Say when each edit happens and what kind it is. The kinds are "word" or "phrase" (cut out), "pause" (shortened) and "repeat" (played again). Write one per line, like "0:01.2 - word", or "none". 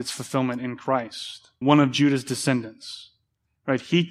0:01.6 - word